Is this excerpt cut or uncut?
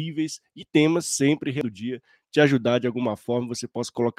uncut